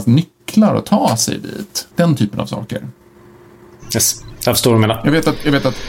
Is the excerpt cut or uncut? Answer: cut